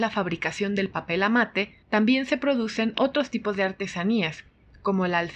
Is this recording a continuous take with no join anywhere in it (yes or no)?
no